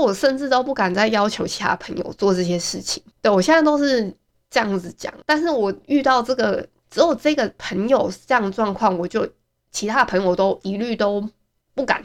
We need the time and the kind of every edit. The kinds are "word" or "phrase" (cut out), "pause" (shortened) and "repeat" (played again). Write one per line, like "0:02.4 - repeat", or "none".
0:03.1 - pause
0:05.2 - pause